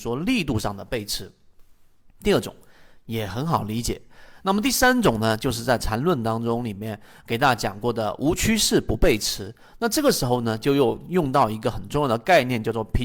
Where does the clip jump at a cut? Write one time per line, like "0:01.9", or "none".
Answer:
none